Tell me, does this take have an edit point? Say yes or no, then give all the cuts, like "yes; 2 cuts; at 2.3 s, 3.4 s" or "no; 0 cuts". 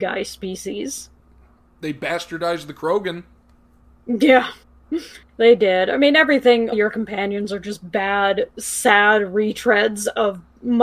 yes; 2 cuts; at 4.6 s, 6.7 s